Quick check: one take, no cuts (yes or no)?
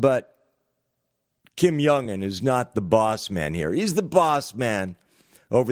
yes